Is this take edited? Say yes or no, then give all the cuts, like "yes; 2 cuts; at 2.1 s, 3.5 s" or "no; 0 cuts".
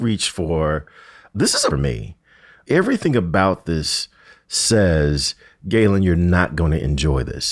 yes; 1 cut; at 1.7 s